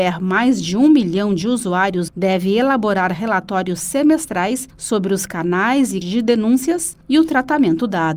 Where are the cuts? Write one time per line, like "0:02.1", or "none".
0:02.1
0:06.0